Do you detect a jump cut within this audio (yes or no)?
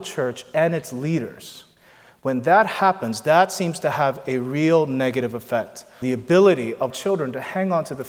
yes